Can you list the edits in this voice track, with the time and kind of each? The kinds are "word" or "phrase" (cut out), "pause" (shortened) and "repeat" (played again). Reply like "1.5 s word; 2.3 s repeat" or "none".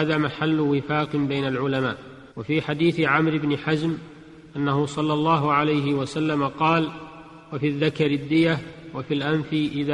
2.3 s pause